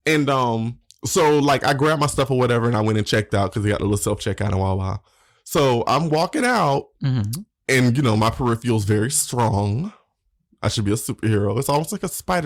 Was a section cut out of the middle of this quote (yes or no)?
no